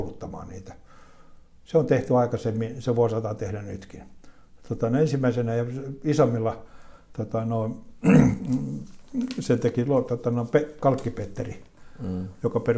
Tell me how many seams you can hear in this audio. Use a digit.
0